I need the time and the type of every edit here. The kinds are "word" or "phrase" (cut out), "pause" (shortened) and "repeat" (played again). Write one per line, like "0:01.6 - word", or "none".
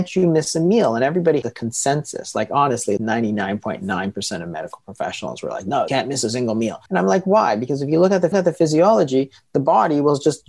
0:01.4 - word
0:03.0 - word
0:05.9 - word
0:06.9 - pause
0:08.3 - repeat